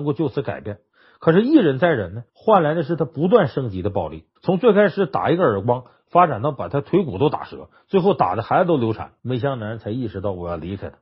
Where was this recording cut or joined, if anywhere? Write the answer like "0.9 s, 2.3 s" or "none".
2.3 s, 4.4 s, 9.2 s

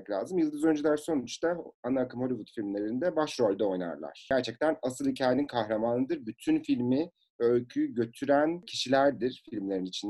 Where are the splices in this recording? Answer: none

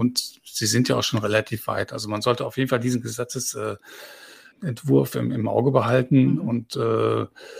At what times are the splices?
none

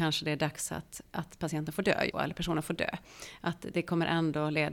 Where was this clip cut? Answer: 2.1 s

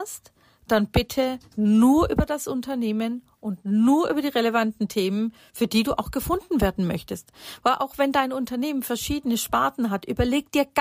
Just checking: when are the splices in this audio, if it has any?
1.5 s

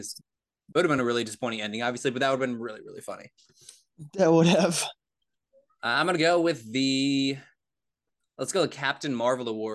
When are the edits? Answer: none

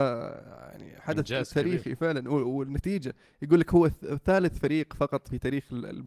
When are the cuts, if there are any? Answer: none

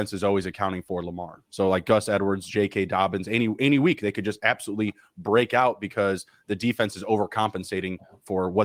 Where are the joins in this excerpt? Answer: 1.5 s

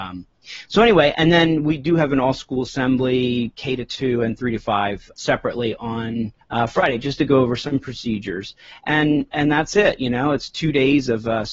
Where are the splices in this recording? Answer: 5.1 s, 6.4 s

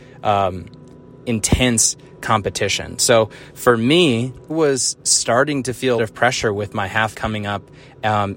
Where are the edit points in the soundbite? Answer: 1.2 s, 4.5 s, 6.0 s, 7.1 s

